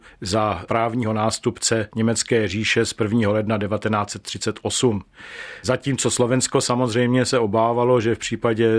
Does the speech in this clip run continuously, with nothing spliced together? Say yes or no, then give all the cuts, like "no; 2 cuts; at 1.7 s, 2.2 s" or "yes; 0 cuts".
yes; 0 cuts